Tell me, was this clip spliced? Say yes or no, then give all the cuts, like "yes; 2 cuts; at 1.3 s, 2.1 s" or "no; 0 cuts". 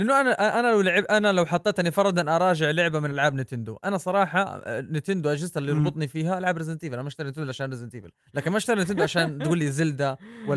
no; 0 cuts